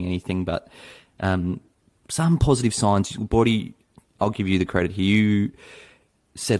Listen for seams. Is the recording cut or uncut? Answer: uncut